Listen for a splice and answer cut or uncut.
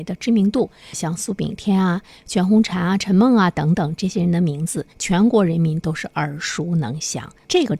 cut